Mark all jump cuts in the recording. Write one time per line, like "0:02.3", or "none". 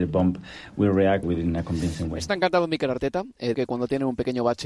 0:01.2
0:03.5